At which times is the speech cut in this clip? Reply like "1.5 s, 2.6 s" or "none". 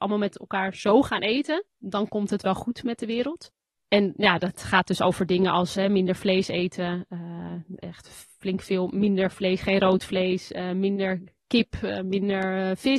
1.7 s